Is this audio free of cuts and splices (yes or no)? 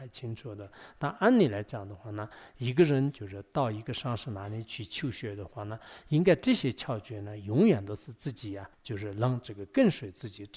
no